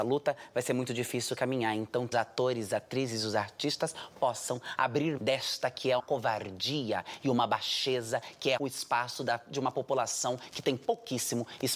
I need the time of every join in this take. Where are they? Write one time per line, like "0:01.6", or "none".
0:02.1
0:05.2
0:06.0
0:08.6

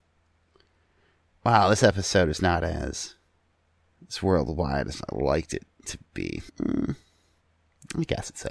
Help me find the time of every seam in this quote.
0:03.6
0:06.5

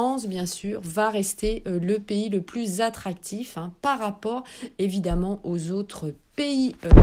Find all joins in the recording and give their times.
none

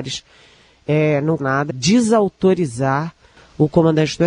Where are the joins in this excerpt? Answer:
0:01.4
0:01.7

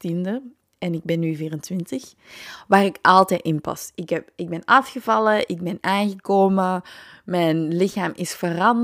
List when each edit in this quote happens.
none

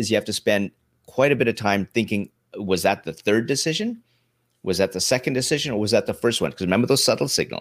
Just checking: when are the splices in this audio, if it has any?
none

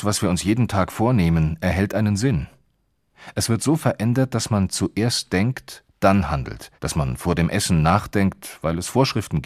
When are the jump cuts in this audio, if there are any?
0:06.8

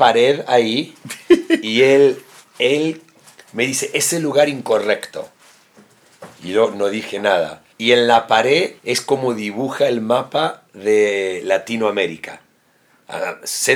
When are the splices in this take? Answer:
0:02.4
0:07.7
0:08.8

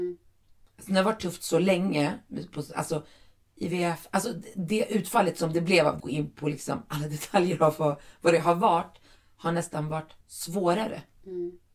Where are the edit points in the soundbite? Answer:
0:06.0
0:10.2

